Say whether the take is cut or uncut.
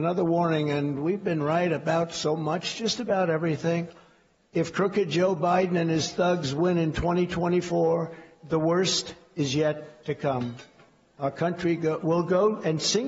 uncut